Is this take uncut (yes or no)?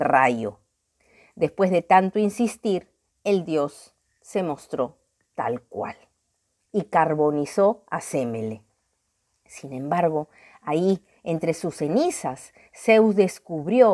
yes